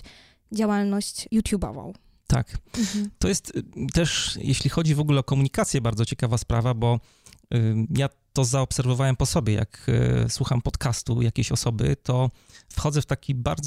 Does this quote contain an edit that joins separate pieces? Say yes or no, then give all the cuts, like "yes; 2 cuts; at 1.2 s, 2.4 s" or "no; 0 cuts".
no; 0 cuts